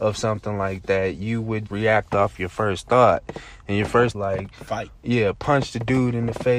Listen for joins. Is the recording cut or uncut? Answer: cut